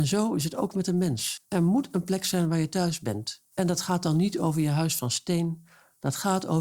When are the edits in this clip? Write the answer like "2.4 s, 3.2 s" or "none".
1.4 s, 3.5 s